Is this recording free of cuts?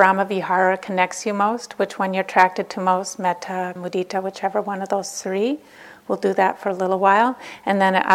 no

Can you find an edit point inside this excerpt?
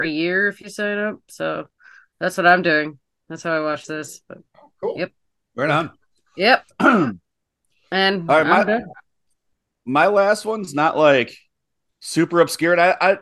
no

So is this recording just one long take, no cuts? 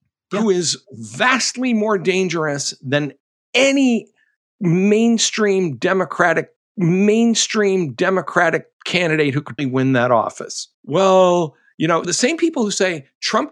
no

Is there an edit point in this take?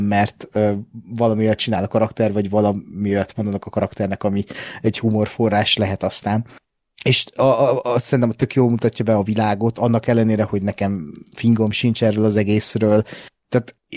yes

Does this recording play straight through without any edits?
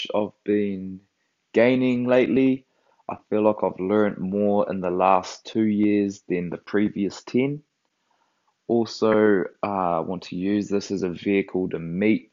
yes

